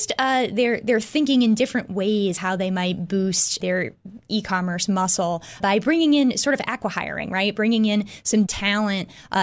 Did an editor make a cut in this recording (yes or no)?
yes